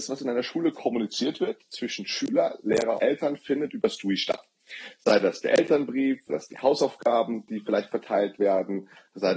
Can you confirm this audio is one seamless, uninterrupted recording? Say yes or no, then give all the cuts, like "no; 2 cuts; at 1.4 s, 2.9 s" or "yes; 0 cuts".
no; 2 cuts; at 3.0 s, 6.3 s